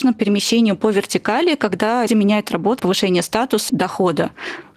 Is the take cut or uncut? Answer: cut